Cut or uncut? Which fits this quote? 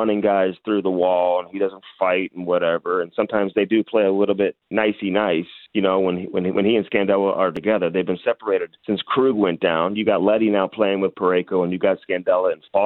cut